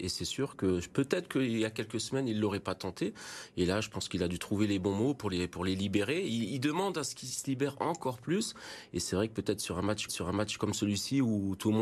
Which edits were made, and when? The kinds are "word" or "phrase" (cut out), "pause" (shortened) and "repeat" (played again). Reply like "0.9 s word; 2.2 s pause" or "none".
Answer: 10.1 s repeat